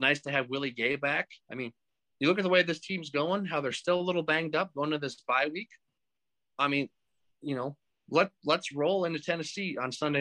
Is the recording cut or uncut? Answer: uncut